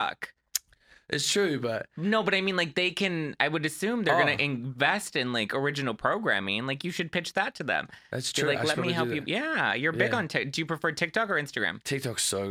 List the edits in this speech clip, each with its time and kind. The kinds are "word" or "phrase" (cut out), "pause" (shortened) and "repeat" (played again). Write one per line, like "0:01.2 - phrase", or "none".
none